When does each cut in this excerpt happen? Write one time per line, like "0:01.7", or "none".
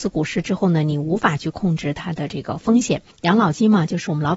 0:03.1

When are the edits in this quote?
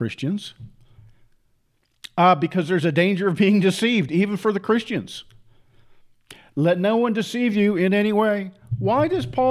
none

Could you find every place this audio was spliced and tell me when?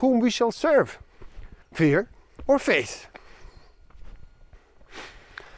0:01.6

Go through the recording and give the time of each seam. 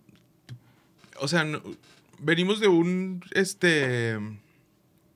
0:01.0

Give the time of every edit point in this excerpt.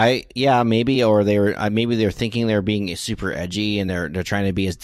none

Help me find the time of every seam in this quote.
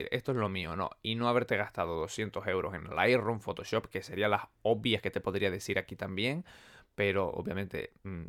none

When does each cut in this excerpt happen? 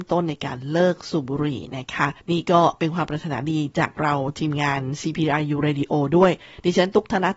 0:02.2

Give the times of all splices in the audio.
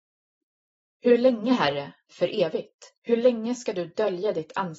0:02.1
0:03.0

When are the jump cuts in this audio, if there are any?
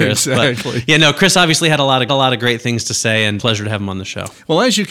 0:02.1
0:03.4

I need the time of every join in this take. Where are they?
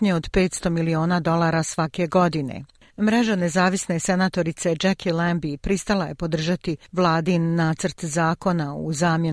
none

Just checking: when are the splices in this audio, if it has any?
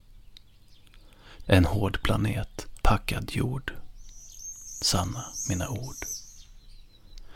0:01.4
0:02.8

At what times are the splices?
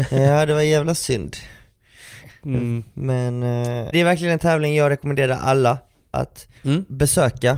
0:03.9
0:06.6

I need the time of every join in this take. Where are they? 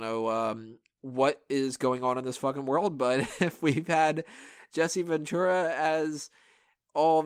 none

